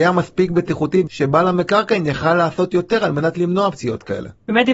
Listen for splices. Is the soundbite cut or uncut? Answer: cut